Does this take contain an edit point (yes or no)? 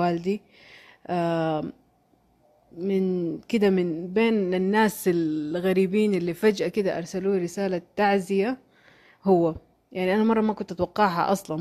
no